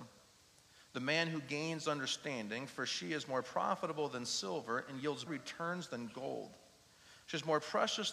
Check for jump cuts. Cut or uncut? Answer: cut